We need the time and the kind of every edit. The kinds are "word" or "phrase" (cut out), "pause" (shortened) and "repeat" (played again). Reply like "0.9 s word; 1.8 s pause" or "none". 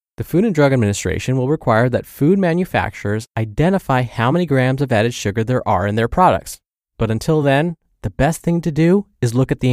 none